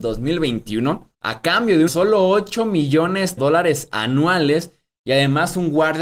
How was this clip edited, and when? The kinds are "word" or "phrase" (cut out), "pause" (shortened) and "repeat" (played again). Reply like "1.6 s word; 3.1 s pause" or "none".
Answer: 1.1 s pause; 1.9 s phrase; 3.4 s word